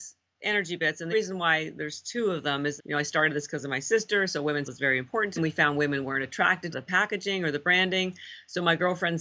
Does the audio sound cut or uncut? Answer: cut